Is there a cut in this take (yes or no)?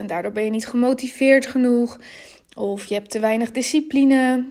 no